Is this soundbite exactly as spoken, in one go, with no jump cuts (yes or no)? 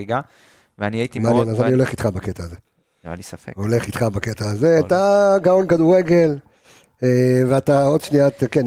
yes